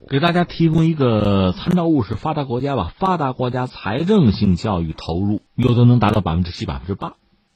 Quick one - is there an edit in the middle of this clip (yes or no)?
yes